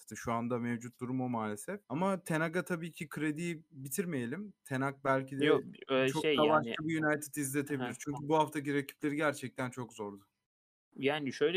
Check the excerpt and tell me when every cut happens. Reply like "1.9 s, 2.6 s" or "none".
1.8 s